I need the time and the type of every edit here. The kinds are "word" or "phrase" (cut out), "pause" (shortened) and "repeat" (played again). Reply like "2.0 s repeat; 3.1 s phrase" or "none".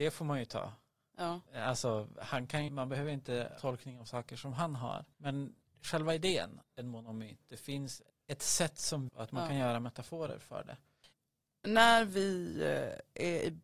1.5 s pause; 2.7 s word; 3.6 s phrase; 5.1 s pause; 6.6 s phrase; 9.1 s phrase